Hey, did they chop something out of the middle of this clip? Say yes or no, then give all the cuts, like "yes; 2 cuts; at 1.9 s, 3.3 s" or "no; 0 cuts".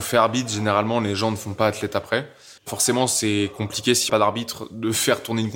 yes; 2 cuts; at 2.6 s, 4.1 s